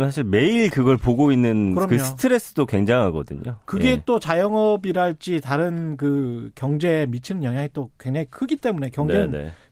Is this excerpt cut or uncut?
uncut